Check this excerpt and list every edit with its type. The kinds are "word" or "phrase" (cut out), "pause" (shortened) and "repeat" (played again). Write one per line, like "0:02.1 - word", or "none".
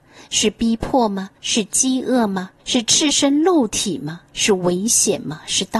0:01.3 - pause
0:02.6 - pause
0:04.3 - pause